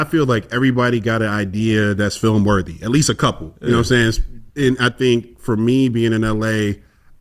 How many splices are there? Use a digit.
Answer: 1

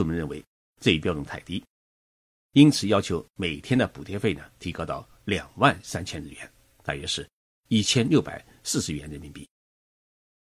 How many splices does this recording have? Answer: 0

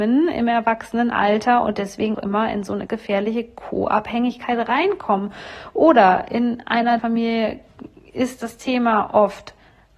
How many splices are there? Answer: 3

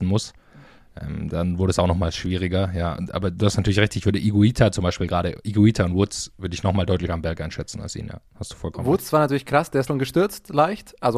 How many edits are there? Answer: 2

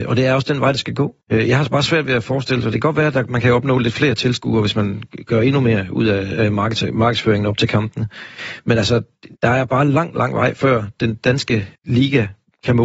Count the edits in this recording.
3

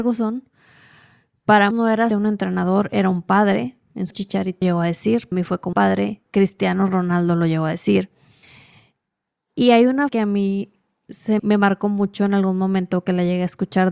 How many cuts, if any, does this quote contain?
8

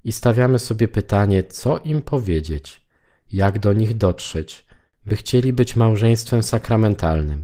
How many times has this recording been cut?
0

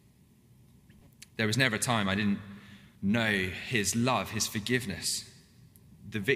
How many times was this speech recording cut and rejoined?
2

